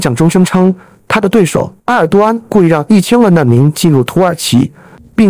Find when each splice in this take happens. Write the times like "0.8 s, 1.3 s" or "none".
1.8 s